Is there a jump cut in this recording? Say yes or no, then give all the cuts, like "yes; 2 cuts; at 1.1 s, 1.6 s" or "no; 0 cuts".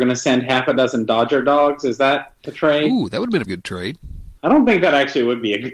yes; 2 cuts; at 3.5 s, 4.4 s